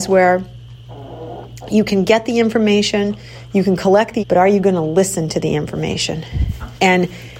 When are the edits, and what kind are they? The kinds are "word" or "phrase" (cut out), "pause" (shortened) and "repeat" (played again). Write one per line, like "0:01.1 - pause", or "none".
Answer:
0:04.2 - word